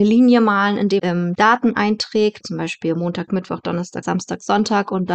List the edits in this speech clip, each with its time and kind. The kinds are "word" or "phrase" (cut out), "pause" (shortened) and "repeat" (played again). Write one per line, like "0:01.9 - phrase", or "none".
0:01.0 - word
0:01.3 - word
0:02.4 - word
0:03.3 - word
0:04.0 - word